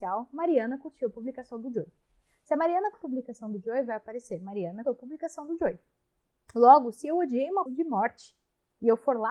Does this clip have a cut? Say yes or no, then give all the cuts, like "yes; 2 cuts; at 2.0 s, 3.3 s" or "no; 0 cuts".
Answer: yes; 3 cuts; at 2.9 s, 4.8 s, 7.7 s